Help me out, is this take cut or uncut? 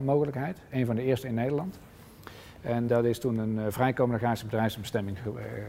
cut